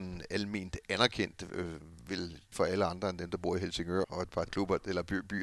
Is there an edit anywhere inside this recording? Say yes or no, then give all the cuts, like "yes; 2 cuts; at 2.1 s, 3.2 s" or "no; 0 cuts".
yes; 3 cuts; at 2.5 s, 4.0 s, 4.5 s